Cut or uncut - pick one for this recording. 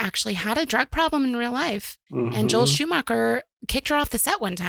cut